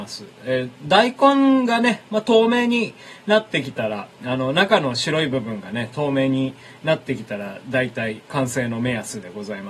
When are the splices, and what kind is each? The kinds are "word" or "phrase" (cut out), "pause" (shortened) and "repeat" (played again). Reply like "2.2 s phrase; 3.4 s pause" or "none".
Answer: none